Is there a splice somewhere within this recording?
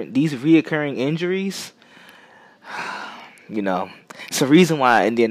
no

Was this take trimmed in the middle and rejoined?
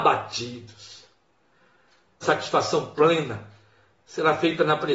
yes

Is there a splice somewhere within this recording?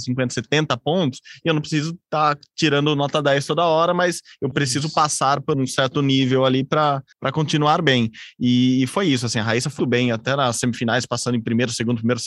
yes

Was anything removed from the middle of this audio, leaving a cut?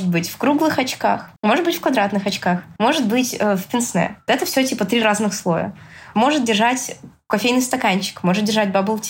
yes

